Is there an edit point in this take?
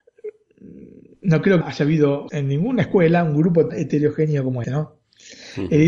yes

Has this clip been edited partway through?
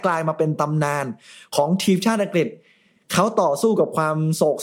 no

